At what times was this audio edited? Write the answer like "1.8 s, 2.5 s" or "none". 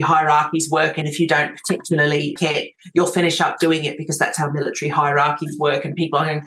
1.0 s, 2.4 s

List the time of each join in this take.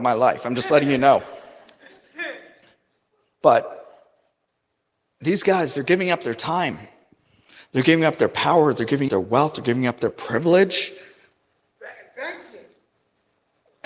9.1 s

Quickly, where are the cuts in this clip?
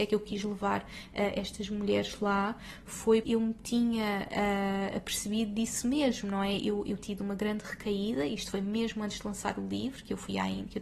3.2 s, 7.0 s

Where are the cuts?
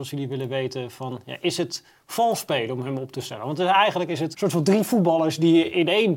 4.3 s

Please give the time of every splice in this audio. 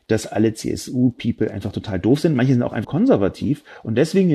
2.8 s

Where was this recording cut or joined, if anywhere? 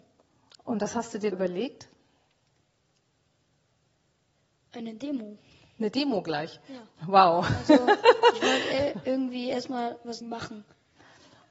1.3 s, 10.2 s

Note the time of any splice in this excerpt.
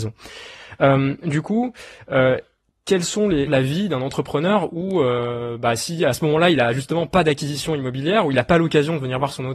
3.5 s

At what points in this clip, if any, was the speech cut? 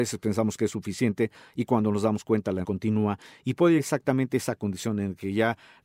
2.6 s, 3.8 s

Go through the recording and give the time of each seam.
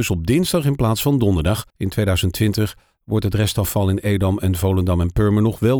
1.7 s

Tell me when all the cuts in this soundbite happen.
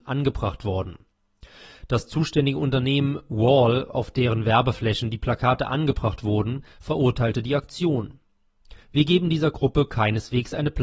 8.8 s

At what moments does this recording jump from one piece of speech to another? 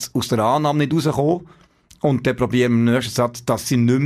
none

